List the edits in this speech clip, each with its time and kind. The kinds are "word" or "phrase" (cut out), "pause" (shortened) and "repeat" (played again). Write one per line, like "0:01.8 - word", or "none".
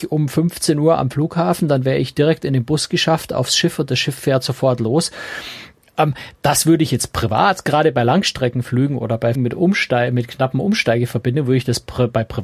0:09.3 - word